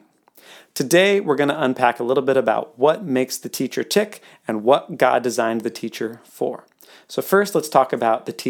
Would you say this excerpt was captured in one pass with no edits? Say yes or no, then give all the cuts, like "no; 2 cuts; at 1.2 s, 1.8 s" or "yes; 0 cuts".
yes; 0 cuts